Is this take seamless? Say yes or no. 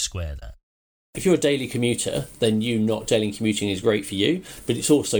yes